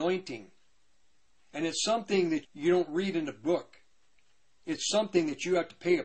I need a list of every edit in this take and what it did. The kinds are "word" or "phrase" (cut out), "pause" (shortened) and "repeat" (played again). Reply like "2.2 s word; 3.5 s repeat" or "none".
2.4 s word